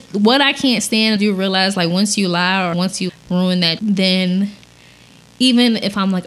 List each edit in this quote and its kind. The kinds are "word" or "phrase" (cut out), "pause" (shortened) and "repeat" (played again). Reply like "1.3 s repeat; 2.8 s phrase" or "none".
1.2 s word; 2.7 s word; 3.1 s word; 3.8 s word